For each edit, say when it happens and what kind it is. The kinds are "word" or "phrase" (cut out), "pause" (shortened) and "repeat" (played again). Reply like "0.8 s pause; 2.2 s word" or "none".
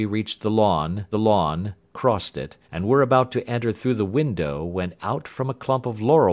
1.1 s repeat; 2.6 s pause